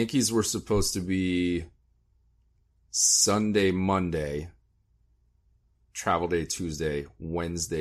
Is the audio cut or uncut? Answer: uncut